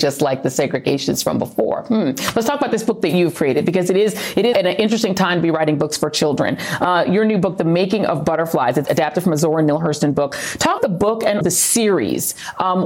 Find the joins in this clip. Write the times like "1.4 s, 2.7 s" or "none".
4.5 s, 8.8 s, 10.8 s, 11.4 s

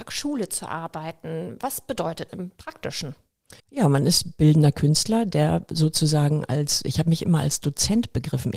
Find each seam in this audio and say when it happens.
2.3 s, 3.6 s

